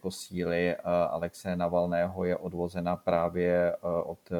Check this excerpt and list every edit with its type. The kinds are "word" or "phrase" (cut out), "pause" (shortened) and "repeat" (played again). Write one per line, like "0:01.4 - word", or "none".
none